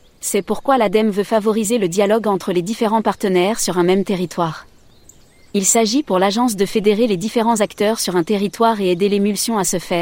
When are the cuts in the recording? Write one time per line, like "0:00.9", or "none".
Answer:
none